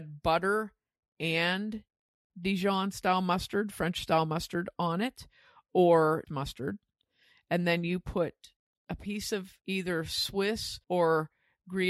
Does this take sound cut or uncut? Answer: cut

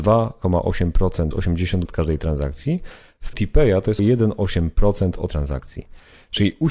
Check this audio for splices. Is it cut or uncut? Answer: cut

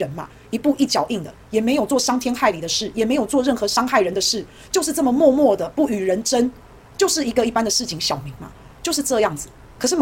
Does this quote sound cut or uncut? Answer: uncut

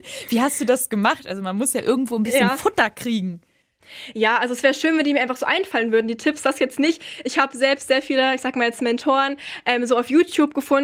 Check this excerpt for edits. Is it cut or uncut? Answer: uncut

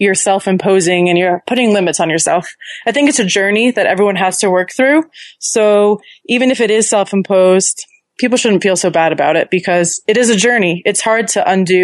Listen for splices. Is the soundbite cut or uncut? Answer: uncut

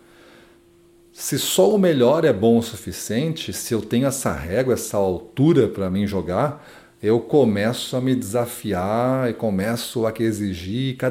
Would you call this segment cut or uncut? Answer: uncut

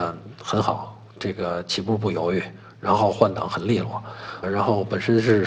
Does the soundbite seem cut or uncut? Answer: cut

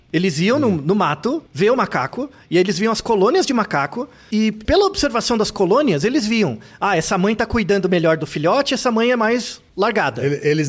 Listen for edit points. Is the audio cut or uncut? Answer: cut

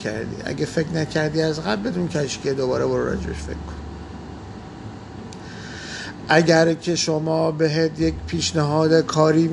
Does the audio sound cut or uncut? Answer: uncut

